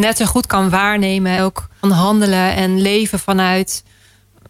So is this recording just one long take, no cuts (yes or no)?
no